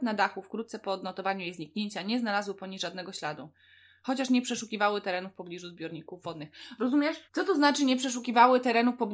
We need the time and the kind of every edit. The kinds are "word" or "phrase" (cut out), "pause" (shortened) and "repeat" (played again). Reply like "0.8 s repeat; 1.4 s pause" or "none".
7.3 s pause